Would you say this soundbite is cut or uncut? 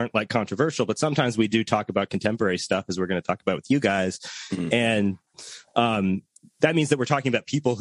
uncut